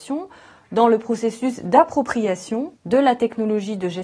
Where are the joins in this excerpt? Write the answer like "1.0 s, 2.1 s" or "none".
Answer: 2.8 s